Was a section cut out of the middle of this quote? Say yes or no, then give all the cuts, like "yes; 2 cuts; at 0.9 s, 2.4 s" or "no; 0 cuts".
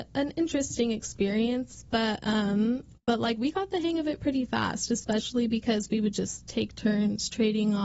no; 0 cuts